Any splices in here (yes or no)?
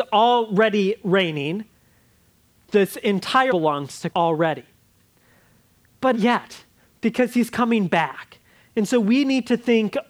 yes